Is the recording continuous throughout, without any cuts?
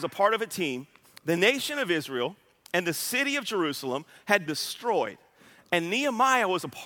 no; 1 cut; at 4.5 s

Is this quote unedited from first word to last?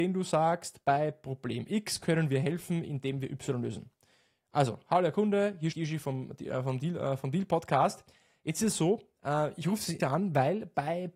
no; 2 cuts; at 5.7 s, 10.0 s

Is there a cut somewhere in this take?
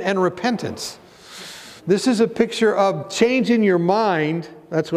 yes; 1 cut; at 1.8 s

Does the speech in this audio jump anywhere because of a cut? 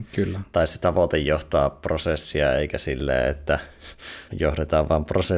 yes; 1 cut; at 4.3 s

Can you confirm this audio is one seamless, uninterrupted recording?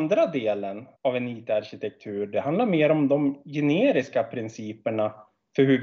no; 1 cut; at 0.9 s

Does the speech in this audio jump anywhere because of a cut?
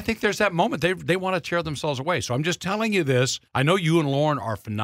yes; 1 cut; at 3.5 s

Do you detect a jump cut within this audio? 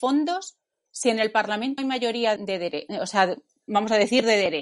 yes; 2 cuts; at 1.8 s, 2.4 s

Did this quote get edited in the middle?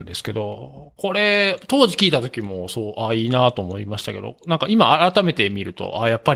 no; 0 cuts

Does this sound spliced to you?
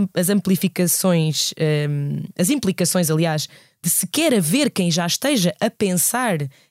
no; 0 cuts

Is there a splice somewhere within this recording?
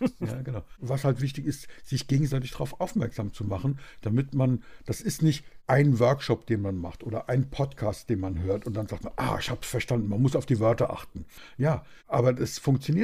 no; 0 cuts

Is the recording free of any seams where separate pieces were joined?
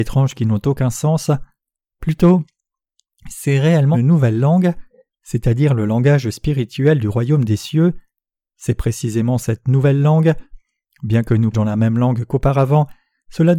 no; 2 cuts; at 3.9 s, 11.5 s

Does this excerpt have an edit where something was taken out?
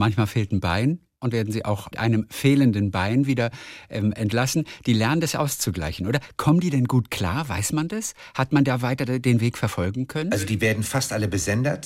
yes; 2 cuts; at 1.3 s, 1.9 s

